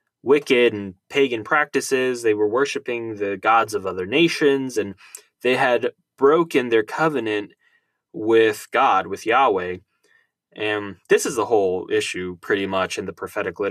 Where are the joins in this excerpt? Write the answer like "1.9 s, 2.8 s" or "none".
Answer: none